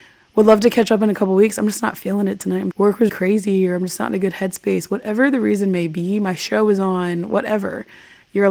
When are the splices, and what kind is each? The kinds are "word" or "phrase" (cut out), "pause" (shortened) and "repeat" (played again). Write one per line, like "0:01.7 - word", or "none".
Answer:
0:02.7 - phrase
0:03.1 - word

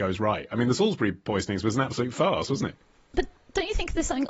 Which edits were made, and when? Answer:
none

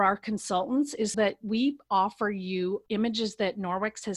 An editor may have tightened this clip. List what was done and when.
0:01.1 - word
0:02.9 - pause

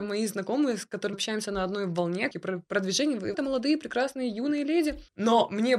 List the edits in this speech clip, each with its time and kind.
0:01.1 - word
0:02.3 - phrase
0:02.7 - word
0:03.3 - word

